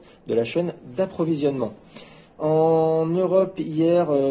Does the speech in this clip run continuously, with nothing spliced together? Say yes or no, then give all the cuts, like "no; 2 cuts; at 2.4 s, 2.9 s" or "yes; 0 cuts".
yes; 0 cuts